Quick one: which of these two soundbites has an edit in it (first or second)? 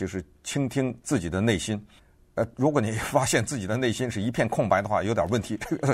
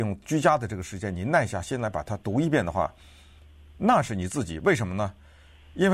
first